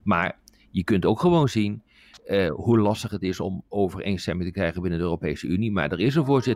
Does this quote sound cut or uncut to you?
uncut